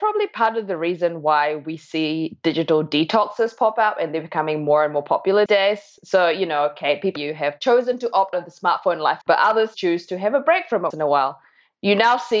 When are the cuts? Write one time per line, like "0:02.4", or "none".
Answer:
0:05.5
0:07.2
0:08.3
0:09.2
0:09.7
0:10.9

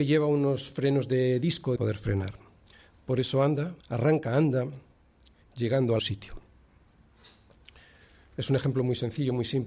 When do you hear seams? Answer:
0:01.8
0:03.8
0:05.5
0:06.0

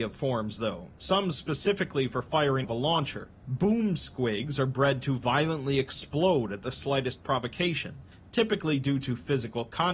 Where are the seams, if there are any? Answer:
0:02.6
0:03.4

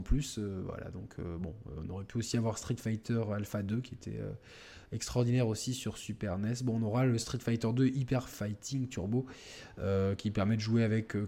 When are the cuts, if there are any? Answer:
none

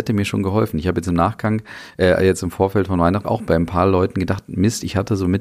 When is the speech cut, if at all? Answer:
0:03.2

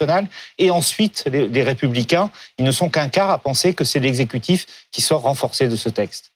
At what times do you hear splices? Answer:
none

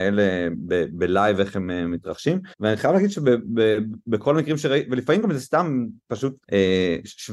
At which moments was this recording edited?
0:02.5
0:06.4

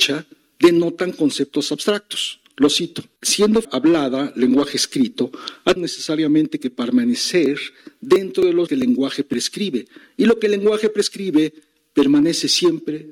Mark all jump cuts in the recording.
0:03.6
0:05.8
0:08.7

